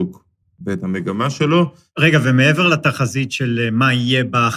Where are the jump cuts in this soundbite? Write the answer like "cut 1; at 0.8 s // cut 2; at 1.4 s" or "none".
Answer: none